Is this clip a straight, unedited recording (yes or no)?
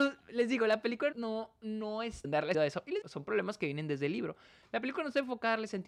no